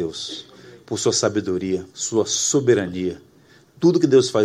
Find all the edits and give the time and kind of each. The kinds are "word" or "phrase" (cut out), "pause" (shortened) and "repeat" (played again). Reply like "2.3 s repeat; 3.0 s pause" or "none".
1.9 s pause